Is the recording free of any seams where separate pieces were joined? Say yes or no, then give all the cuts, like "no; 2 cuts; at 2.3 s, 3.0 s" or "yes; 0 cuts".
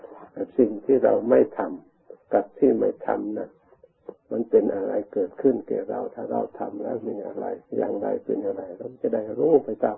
no; 2 cuts; at 2.2 s, 7.7 s